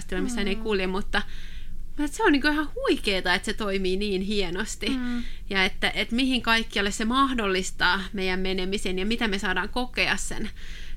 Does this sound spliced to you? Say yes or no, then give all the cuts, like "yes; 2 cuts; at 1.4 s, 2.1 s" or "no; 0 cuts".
no; 0 cuts